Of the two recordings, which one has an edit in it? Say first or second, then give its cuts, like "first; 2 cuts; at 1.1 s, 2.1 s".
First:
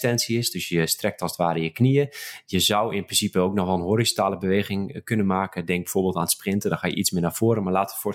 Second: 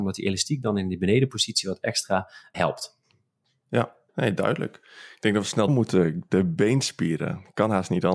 second; 3 cuts; at 2.5 s, 4.1 s, 5.7 s